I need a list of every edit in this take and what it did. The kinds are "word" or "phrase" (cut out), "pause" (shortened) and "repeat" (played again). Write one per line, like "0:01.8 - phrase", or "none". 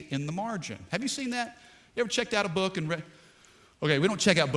none